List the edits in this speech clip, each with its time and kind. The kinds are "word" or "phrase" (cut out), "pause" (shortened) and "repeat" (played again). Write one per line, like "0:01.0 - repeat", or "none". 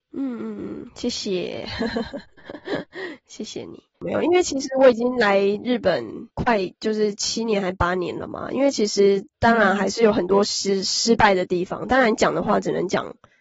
0:03.9 - pause
0:06.3 - pause

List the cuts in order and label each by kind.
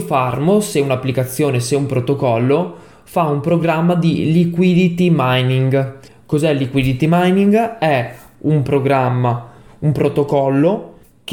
none

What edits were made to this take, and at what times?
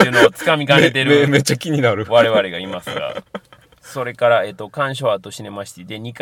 none

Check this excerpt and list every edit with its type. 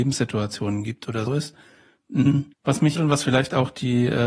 0:01.3 - phrase
0:02.5 - pause
0:03.0 - word

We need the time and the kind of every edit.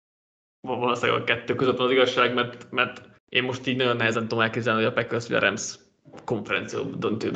0:03.2 - pause

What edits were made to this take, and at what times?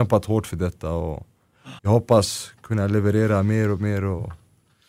0:01.8 - pause

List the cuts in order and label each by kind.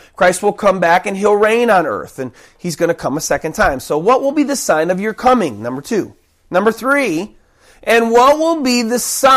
none

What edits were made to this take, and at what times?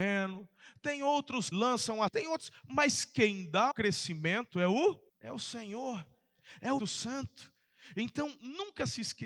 0:01.5 - word
0:02.1 - word
0:03.7 - word
0:05.1 - pause
0:06.8 - word

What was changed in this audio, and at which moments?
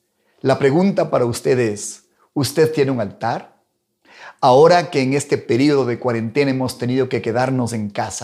none

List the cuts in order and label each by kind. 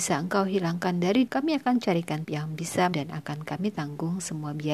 0:01.3 - word
0:02.2 - word
0:02.9 - word

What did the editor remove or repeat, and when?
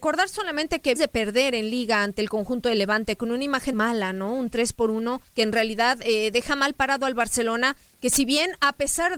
0:01.0 - word
0:03.7 - word
0:05.3 - pause

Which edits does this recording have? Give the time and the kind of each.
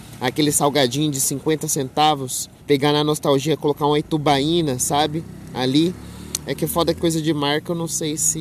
0:02.6 - pause
0:07.0 - word

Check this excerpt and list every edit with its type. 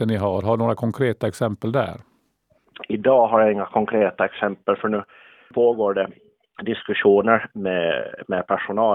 none

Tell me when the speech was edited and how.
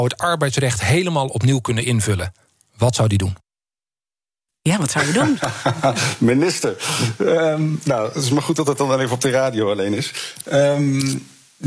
none

